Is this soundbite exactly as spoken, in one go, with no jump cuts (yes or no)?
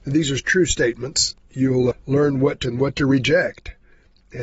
no